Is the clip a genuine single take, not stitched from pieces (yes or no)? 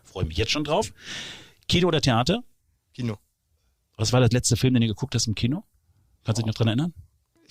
yes